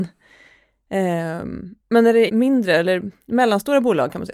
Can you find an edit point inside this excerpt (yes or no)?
yes